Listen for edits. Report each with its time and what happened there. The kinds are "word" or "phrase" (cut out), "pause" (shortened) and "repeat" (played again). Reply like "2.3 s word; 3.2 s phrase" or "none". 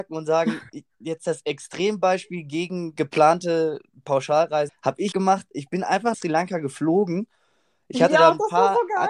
4.7 s phrase; 5.1 s word; 6.1 s word

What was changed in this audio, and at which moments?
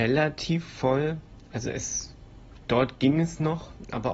none

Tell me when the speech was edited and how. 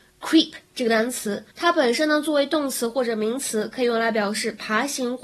1.5 s pause

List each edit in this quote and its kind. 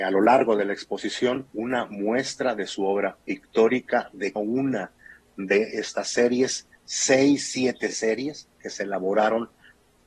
1.5 s pause; 4.4 s word; 8.5 s pause

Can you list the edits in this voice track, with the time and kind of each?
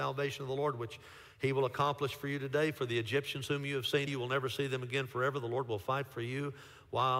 4.1 s word

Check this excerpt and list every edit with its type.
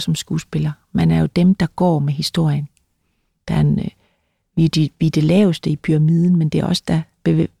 none

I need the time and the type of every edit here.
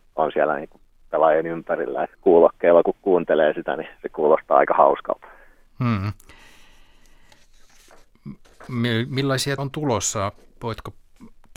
2.1 s word; 9.6 s word

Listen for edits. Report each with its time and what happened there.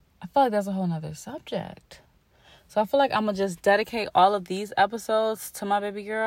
none

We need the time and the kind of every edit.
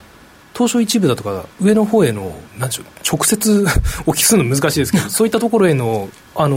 1.5 s pause; 2.5 s pause

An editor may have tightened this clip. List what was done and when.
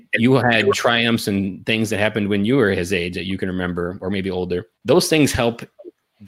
4.7 s pause

